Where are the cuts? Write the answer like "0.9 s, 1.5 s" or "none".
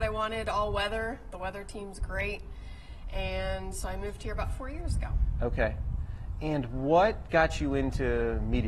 none